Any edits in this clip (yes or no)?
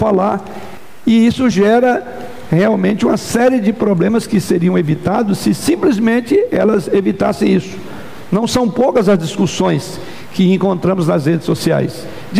no